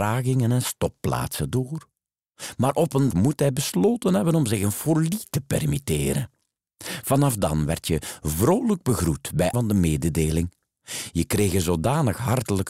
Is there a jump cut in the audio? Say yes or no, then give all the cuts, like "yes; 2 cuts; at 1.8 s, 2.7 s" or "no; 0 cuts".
yes; 2 cuts; at 3.1 s, 9.5 s